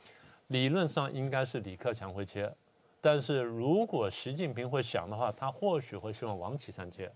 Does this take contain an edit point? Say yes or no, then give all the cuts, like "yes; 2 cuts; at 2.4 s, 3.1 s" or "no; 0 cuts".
no; 0 cuts